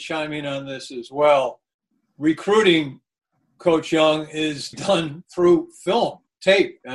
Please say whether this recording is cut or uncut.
cut